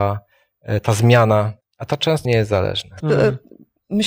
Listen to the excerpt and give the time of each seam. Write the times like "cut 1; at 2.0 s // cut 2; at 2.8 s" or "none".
cut 1; at 1.6 s // cut 2; at 2.2 s // cut 3; at 3.0 s